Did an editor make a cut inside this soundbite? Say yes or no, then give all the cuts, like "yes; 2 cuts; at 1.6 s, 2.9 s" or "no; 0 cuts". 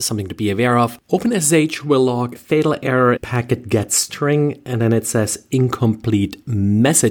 yes; 3 cuts; at 1.0 s, 2.4 s, 3.2 s